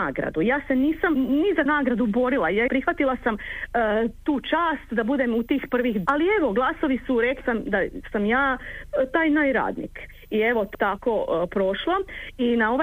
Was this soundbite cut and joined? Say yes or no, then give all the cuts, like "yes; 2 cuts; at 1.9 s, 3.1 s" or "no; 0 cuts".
yes; 6 cuts; at 1.1 s, 1.7 s, 2.7 s, 6.1 s, 7.4 s, 10.7 s